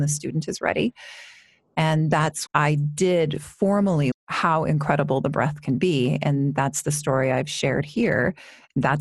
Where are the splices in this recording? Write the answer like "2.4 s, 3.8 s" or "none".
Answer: 2.5 s, 4.1 s